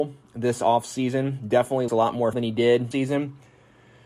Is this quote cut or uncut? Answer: cut